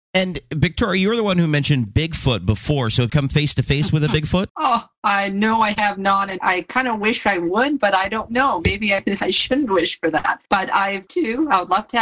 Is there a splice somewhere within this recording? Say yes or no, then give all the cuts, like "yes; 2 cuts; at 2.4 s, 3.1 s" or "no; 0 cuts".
yes; 5 cuts; at 3.1 s, 4.5 s, 6.4 s, 10.5 s, 11.1 s